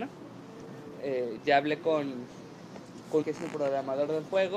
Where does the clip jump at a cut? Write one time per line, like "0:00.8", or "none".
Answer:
0:03.2